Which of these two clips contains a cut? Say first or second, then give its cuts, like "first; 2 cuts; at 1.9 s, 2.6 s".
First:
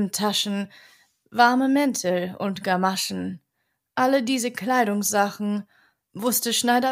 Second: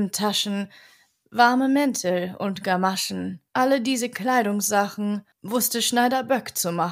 second; 2 cuts; at 3.5 s, 5.3 s